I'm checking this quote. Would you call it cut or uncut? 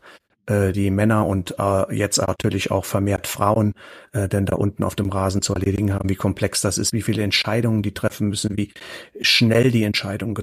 uncut